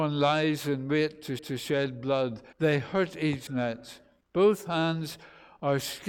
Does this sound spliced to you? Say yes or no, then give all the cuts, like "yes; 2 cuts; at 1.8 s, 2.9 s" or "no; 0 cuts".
yes; 4 cuts; at 1.4 s, 2.5 s, 3.5 s, 4.2 s